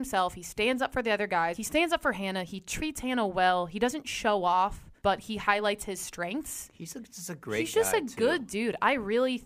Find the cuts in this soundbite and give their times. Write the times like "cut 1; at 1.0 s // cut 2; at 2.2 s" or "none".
cut 1; at 5.0 s